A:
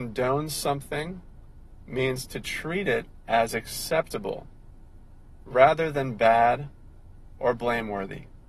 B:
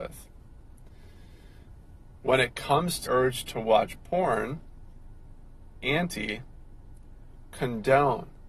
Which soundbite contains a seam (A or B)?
B